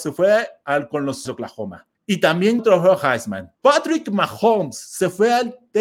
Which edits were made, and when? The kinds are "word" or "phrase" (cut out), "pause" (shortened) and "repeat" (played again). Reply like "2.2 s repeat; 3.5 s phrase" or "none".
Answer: 1.3 s word; 1.9 s pause; 2.6 s word; 3.5 s pause